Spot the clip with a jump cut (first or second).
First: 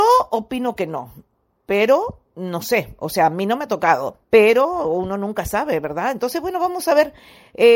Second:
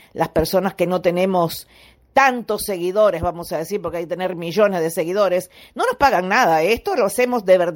first